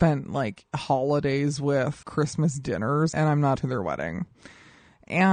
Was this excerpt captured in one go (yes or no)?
no